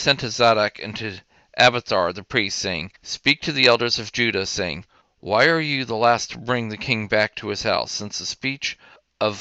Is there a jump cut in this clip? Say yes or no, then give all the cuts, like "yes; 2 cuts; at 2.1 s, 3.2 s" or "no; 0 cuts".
yes; 1 cut; at 3.0 s